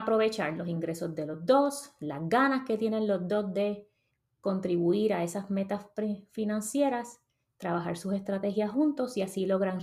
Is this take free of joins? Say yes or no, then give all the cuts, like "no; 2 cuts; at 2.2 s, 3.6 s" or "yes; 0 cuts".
yes; 0 cuts